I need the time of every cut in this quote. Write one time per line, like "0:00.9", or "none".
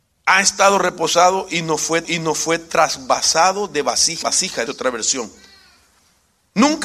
0:02.0
0:04.2
0:04.7